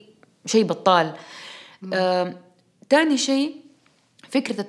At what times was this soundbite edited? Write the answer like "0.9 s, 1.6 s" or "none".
none